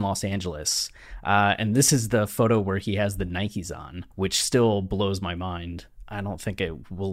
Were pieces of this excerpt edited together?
yes; 1 cut; at 4.1 s

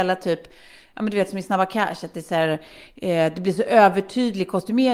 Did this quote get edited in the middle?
no; 0 cuts

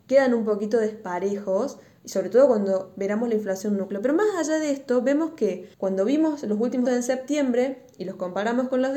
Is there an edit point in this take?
yes; 2 cuts; at 5.7 s, 6.9 s

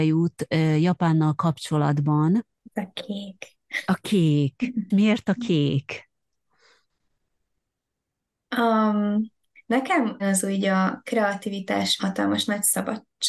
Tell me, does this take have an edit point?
yes; 3 cuts; at 4.9 s, 10.2 s, 12.0 s

